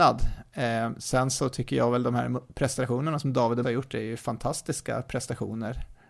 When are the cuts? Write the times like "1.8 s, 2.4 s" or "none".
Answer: 3.6 s